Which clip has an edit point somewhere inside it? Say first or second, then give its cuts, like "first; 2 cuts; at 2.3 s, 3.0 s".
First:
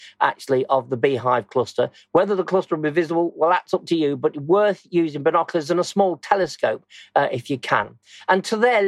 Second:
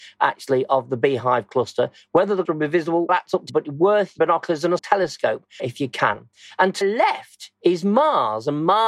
second; 7 cuts; at 2.4 s, 3.1 s, 3.5 s, 4.2 s, 4.8 s, 5.6 s, 6.8 s